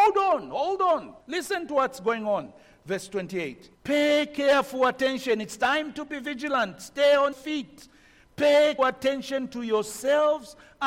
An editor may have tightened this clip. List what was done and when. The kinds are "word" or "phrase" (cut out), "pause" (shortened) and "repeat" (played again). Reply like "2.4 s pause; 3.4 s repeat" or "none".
1.2 s pause; 3.7 s pause; 7.3 s word; 8.8 s word